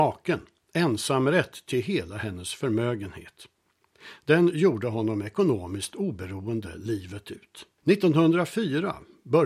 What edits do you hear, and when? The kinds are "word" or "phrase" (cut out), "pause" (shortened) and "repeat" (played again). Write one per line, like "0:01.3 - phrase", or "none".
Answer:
0:07.8 - pause